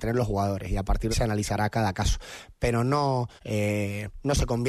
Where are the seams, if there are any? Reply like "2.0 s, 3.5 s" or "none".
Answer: 1.1 s, 3.4 s